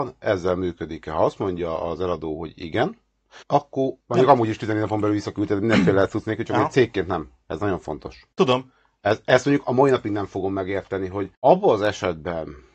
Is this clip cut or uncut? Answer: cut